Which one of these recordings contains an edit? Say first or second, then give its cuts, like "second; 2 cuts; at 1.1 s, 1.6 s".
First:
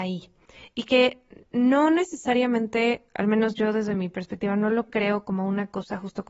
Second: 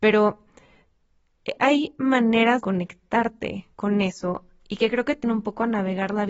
second; 4 cuts; at 1.6 s, 2.6 s, 3.7 s, 5.2 s